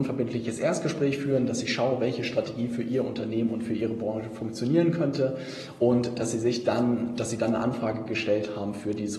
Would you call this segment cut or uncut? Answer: uncut